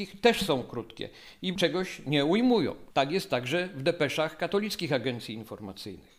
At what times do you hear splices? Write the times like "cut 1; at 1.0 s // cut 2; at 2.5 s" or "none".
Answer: cut 1; at 1.5 s